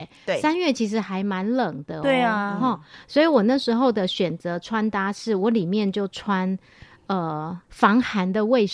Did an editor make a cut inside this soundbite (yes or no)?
yes